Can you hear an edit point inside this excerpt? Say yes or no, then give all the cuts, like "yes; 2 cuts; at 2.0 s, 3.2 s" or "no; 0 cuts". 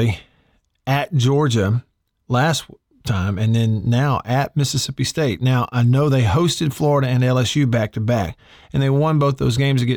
no; 0 cuts